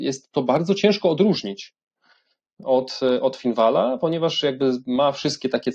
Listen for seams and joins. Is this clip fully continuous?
yes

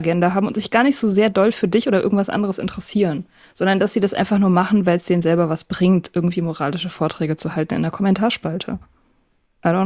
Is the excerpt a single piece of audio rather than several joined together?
yes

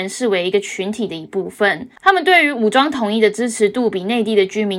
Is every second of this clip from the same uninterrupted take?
no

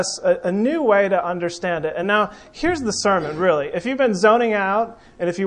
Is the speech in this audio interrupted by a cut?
no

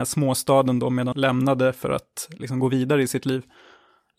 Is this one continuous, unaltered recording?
no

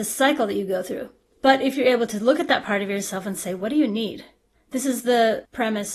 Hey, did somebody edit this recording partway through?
no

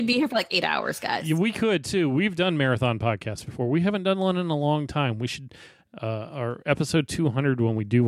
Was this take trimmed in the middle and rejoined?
no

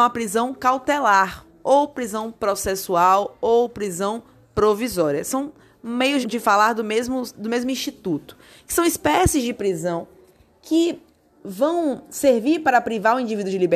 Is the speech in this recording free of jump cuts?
no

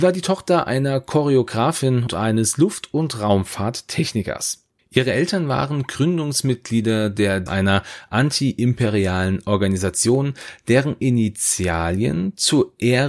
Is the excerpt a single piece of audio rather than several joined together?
no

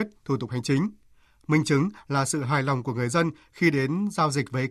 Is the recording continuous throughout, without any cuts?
yes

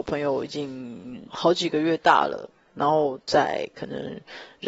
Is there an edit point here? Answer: yes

